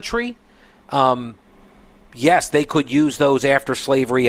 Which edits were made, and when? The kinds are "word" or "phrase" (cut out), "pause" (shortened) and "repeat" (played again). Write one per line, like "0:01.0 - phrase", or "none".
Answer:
none